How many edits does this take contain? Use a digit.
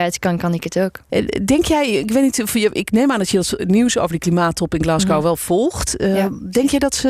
1